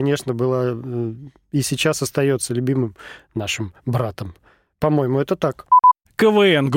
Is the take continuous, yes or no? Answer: yes